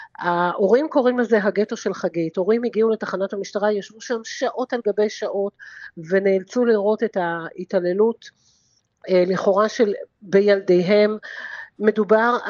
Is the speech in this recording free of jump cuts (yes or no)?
yes